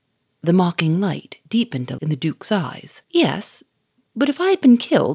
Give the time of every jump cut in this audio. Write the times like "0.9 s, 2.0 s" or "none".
2.0 s, 3.0 s